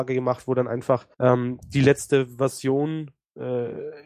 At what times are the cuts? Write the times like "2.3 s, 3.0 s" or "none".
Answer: 1.1 s